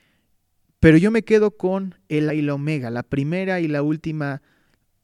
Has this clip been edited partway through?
yes; 1 cut; at 2.3 s

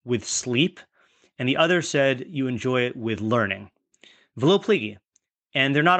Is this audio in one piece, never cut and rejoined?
yes; 0 cuts

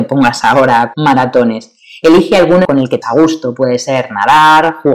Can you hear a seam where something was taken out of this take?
yes; 3 cuts; at 0.9 s, 2.6 s, 3.0 s

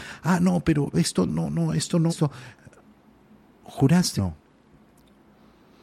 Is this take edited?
yes; 4 cuts; at 0.9 s, 1.3 s, 2.1 s, 4.2 s

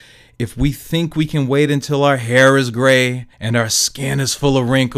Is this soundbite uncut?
no; 1 cut; at 3.3 s

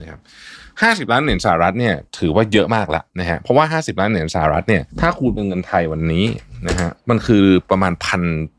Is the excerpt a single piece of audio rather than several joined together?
no; 4 cuts; at 2.1 s, 3.1 s, 4.9 s, 7.0 s

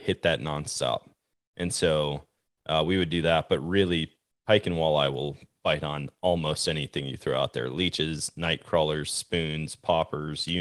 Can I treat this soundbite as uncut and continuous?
yes; 0 cuts

